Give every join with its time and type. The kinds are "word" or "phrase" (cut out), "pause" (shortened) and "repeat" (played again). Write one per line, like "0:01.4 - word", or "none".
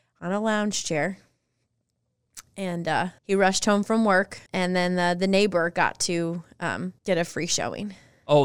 0:03.2 - pause
0:04.5 - pause
0:07.0 - pause

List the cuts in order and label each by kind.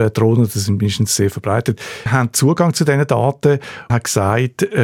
0:02.1 - word
0:03.9 - phrase

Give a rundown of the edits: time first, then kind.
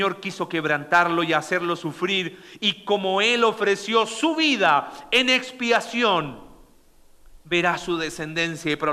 none

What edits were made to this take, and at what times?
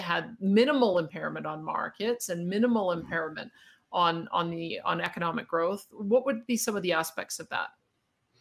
none

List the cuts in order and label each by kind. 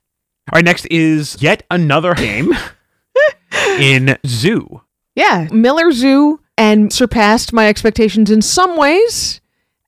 0:01.4 - word
0:02.2 - word
0:04.2 - word
0:05.5 - word
0:06.5 - word
0:06.9 - word

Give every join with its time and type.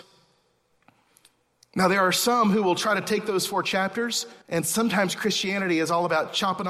0:04.4 - pause

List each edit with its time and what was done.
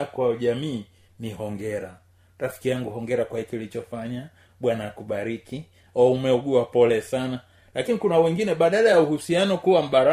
none

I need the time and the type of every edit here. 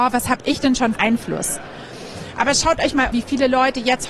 0:00.9 - phrase
0:03.1 - word

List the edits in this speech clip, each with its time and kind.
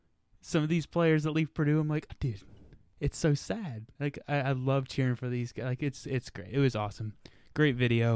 0:02.1 - word
0:03.9 - pause

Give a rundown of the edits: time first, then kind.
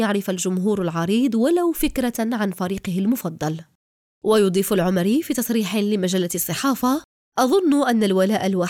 none

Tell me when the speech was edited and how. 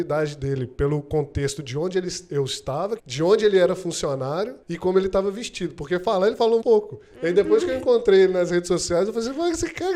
0:03.0 - phrase
0:04.6 - pause
0:06.6 - word

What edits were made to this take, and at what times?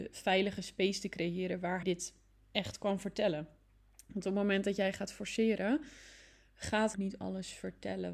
0:01.8 - word
0:06.9 - phrase

